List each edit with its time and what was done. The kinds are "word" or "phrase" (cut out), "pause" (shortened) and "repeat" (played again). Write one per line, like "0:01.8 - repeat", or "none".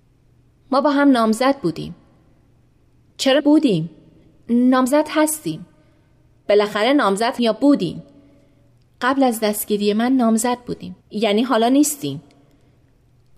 0:03.4 - word
0:07.4 - word
0:11.0 - pause